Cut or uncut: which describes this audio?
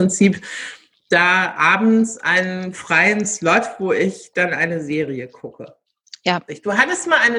uncut